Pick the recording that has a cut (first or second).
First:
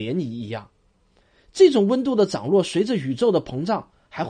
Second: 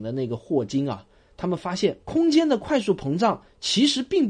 second